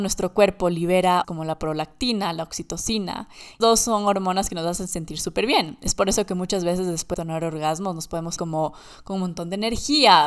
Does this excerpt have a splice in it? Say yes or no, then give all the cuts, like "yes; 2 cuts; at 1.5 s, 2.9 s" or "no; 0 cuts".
yes; 4 cuts; at 1.2 s, 3.6 s, 7.1 s, 8.4 s